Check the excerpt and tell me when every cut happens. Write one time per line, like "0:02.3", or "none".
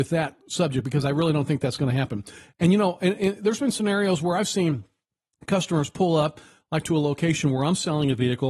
none